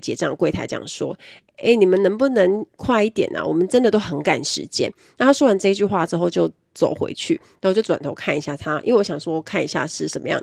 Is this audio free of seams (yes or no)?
yes